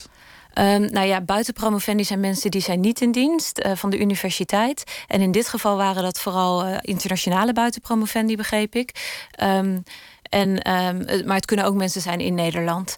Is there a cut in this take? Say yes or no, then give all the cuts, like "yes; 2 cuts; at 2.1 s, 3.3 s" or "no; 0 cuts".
no; 0 cuts